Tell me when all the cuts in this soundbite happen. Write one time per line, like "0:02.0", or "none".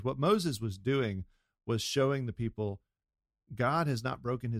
none